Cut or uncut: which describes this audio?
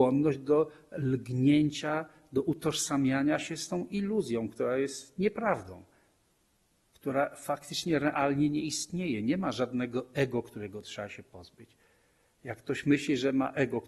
uncut